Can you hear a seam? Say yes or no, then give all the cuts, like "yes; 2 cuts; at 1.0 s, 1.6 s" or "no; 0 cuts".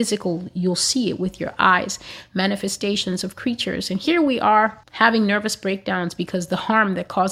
yes; 1 cut; at 4.8 s